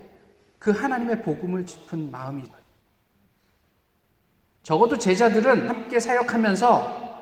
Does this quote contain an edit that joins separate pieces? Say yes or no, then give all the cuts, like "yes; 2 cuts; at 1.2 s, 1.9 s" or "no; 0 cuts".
yes; 3 cuts; at 1.7 s, 2.4 s, 5.7 s